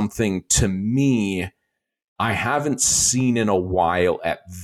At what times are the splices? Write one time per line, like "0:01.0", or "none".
none